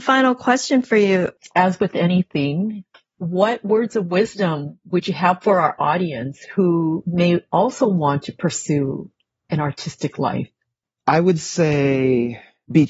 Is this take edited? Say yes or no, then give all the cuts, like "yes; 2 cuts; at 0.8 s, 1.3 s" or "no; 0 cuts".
no; 0 cuts